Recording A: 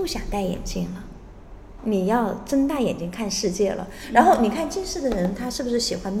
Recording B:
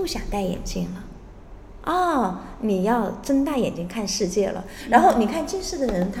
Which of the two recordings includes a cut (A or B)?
A